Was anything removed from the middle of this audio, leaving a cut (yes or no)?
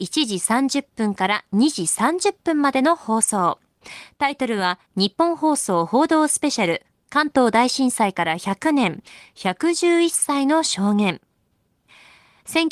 yes